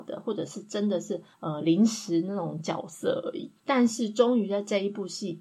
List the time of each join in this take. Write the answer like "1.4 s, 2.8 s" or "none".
1.3 s, 3.6 s